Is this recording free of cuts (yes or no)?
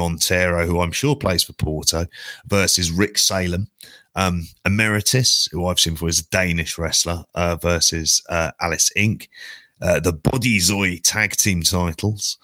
yes